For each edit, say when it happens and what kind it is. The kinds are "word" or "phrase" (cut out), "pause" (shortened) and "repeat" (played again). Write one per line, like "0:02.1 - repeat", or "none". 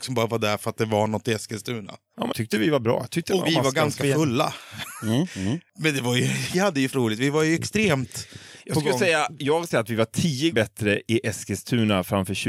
0:02.3 - word
0:03.4 - word
0:06.5 - word
0:06.9 - word
0:09.7 - word
0:10.5 - word